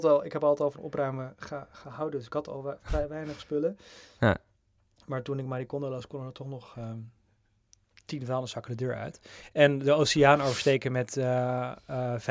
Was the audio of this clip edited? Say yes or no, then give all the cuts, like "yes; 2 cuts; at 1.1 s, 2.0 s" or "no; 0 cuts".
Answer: no; 0 cuts